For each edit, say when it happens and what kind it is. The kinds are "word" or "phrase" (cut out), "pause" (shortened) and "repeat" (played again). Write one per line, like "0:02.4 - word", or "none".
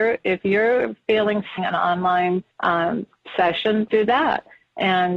0:01.6 - phrase
0:02.5 - pause
0:03.9 - word